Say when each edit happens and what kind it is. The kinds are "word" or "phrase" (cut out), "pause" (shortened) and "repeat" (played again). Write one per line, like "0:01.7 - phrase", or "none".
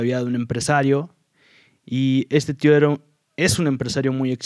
none